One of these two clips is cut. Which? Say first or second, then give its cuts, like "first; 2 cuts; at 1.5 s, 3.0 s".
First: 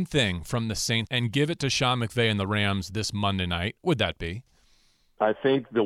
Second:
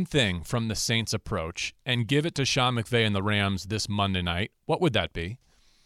first; 2 cuts; at 1.1 s, 3.8 s